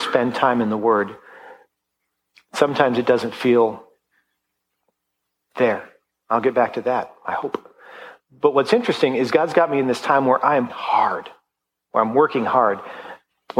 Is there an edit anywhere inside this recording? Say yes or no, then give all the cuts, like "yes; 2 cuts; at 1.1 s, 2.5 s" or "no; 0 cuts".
yes; 1 cut; at 10.7 s